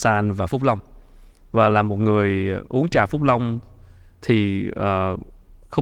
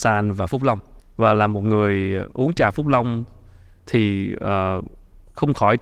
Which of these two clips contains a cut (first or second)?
second